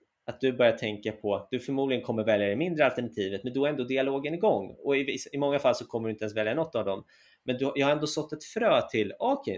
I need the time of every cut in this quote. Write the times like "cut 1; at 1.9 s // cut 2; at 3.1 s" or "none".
none